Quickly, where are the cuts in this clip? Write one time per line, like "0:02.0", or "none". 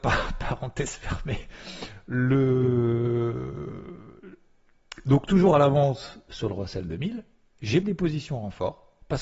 0:07.8